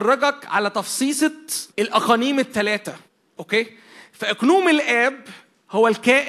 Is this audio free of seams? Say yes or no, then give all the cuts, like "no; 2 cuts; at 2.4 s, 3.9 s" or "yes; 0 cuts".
no; 2 cuts; at 1.7 s, 3.1 s